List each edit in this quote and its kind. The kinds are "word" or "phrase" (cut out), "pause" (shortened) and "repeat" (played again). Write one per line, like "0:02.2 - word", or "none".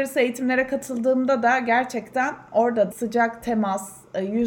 0:02.9 - phrase